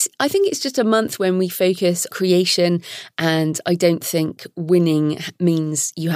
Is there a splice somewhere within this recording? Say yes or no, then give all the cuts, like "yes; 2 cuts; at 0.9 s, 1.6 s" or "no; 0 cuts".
yes; 1 cut; at 2.1 s